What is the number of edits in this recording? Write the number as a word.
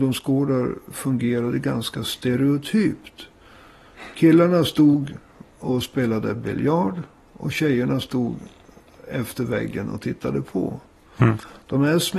zero